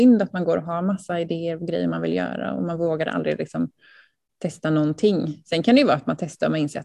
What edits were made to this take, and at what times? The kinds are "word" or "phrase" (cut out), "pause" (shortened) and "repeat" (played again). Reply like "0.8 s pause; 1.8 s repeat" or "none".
none